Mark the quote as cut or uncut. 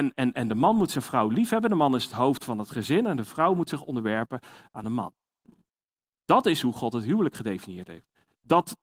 uncut